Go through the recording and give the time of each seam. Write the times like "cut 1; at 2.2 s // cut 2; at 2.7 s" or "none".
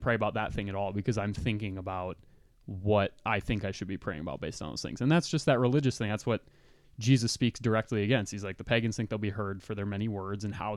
none